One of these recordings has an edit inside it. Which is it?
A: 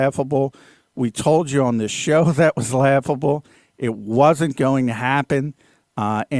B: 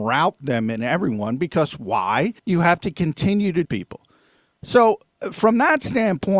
B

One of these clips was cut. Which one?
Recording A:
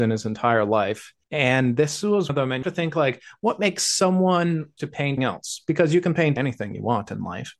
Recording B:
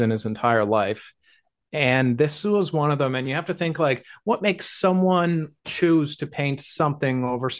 A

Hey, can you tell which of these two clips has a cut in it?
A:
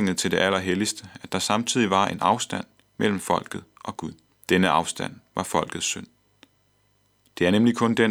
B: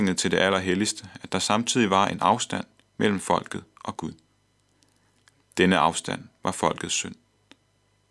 A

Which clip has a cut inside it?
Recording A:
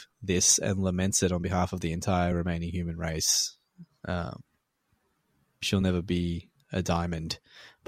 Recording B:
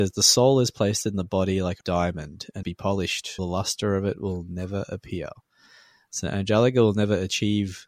B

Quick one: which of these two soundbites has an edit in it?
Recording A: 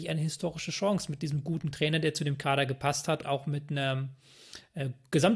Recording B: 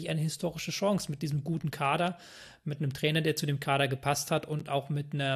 A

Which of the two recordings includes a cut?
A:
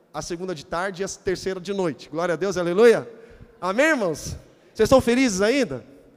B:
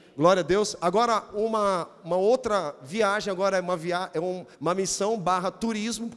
B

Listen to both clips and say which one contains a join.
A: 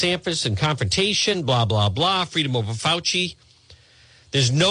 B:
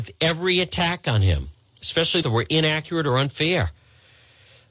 B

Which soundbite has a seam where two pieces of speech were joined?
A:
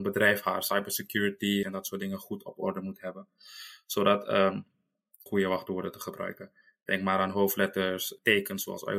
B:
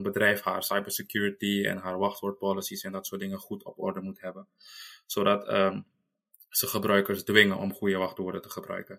A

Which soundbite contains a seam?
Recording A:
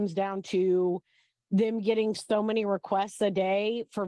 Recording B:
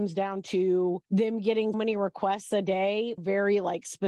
B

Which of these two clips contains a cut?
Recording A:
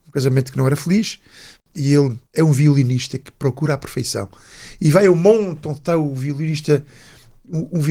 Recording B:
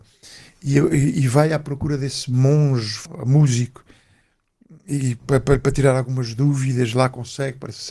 A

